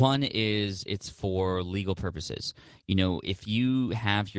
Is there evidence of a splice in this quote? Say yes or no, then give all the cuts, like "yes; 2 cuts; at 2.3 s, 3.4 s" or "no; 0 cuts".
no; 0 cuts